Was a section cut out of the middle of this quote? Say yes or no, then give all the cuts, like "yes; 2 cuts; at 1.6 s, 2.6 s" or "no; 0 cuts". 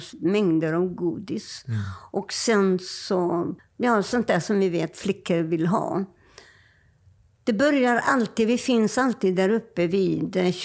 yes; 1 cut; at 3.6 s